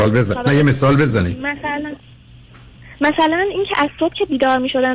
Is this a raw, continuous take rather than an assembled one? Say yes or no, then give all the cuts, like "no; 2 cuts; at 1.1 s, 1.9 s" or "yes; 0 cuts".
yes; 0 cuts